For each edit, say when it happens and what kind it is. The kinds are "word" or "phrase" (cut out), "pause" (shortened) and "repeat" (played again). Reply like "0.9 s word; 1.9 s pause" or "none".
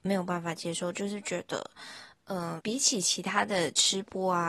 2.6 s word